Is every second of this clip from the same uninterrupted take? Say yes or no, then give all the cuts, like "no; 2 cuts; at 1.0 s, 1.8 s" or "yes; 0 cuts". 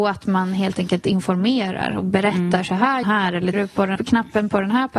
no; 3 cuts; at 3.0 s, 3.5 s, 4.0 s